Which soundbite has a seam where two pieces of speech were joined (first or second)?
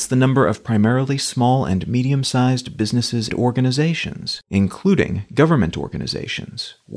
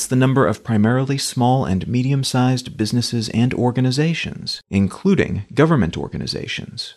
first